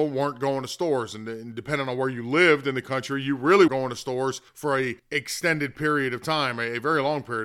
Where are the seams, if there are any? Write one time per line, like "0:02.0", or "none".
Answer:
0:03.7
0:04.5
0:05.0

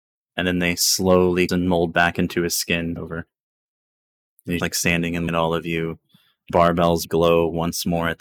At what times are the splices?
0:01.5
0:03.0
0:04.6
0:05.3
0:06.5
0:07.0

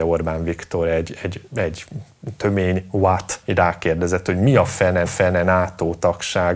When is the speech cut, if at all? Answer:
0:01.5
0:03.4
0:05.1

